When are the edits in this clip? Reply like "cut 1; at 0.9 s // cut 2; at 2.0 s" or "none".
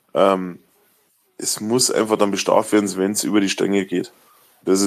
none